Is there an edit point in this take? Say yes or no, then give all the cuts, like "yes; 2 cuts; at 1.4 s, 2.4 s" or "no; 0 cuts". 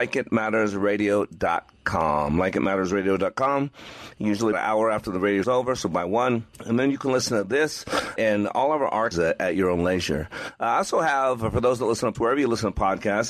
yes; 6 cuts; at 4.5 s, 5.4 s, 6.5 s, 8.2 s, 9.1 s, 12.1 s